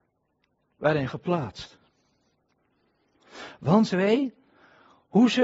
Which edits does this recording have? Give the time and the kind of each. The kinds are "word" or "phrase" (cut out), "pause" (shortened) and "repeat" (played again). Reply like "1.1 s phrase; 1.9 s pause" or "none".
1.1 s phrase; 3.9 s phrase

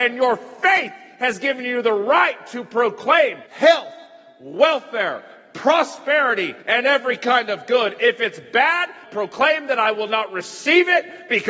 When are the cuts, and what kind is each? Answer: 3.5 s pause; 6.6 s pause; 9.0 s word

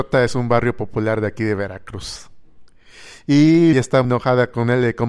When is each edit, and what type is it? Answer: 3.7 s word; 4.0 s word

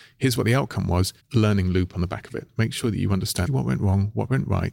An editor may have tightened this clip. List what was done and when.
1.2 s pause; 3.5 s word

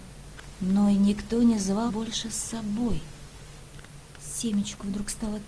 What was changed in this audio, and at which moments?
1.9 s word

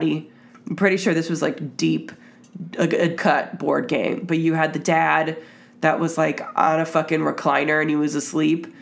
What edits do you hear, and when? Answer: 3.2 s word

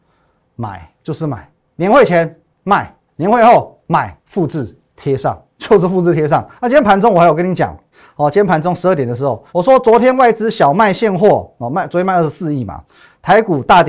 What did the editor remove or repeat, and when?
1.0 s pause; 1.6 s pause; 3.1 s pause; 4.2 s pause; 5.5 s pause; 6.6 s pause; 7.9 s pause; 9.5 s pause

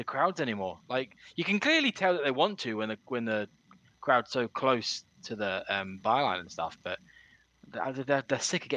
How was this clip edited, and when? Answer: none

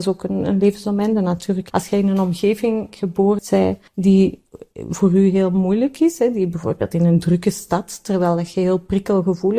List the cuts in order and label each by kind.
1.7 s word; 3.4 s phrase; 3.9 s pause

